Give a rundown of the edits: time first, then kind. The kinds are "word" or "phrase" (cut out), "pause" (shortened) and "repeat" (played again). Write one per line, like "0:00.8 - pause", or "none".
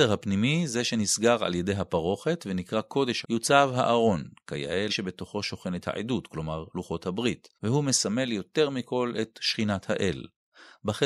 0:03.2 - word
0:04.9 - word
0:07.5 - pause